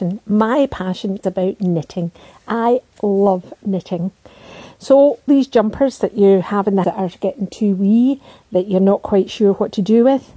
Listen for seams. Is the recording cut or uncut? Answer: cut